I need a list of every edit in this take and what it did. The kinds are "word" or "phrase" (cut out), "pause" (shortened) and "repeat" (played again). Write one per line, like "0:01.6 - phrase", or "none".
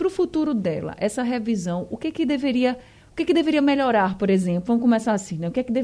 none